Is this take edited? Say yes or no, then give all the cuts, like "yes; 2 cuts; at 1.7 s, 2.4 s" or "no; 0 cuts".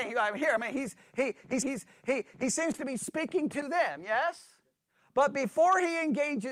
yes; 1 cut; at 1.6 s